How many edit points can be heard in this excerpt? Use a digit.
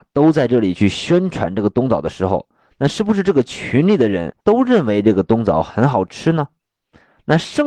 1